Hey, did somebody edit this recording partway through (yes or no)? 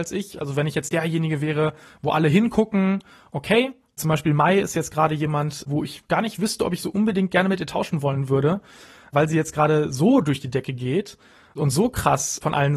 no